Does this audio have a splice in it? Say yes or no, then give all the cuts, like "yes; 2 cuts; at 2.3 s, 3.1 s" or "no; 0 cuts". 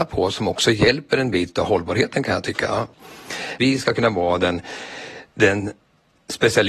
no; 0 cuts